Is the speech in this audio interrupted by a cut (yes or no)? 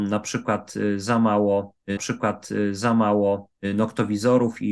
yes